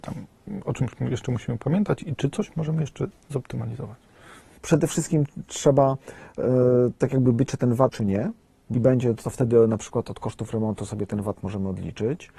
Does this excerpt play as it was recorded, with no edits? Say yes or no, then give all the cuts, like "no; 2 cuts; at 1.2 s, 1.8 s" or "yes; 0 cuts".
no; 3 cuts; at 7.5 s, 7.9 s, 8.7 s